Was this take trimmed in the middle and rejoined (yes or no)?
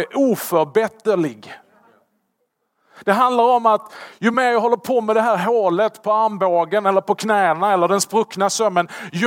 no